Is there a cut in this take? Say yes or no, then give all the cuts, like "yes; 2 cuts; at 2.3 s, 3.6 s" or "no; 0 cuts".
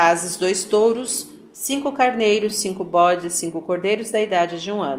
no; 0 cuts